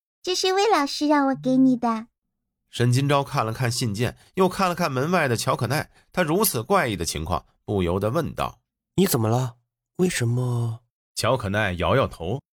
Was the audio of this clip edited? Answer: yes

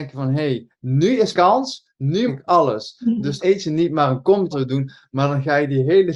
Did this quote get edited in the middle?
yes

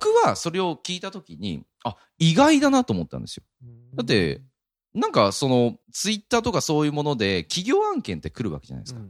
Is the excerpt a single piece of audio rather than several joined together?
no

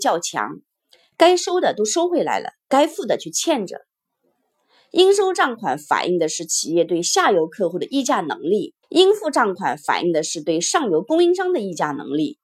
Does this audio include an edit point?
yes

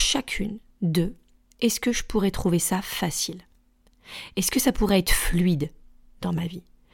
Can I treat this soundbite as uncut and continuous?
yes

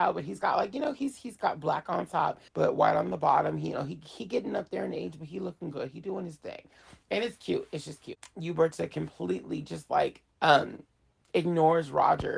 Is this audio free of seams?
no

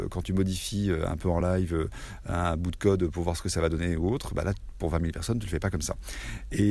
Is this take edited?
no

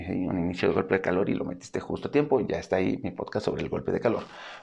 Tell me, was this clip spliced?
no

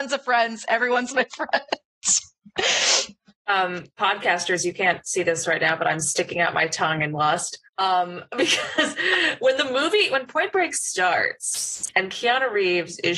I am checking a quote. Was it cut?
yes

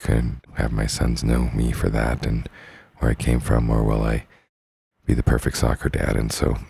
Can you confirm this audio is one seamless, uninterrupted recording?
yes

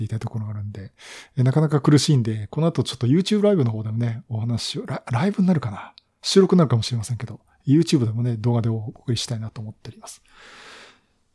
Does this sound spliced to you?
no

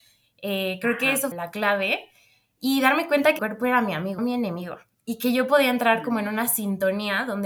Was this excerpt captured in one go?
no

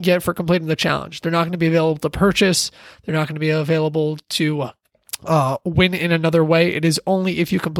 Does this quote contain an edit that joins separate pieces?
no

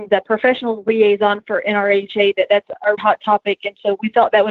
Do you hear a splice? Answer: yes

